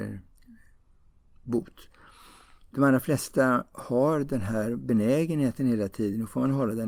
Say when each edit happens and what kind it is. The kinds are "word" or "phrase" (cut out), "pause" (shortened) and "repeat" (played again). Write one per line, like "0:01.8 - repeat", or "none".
0:02.7 - pause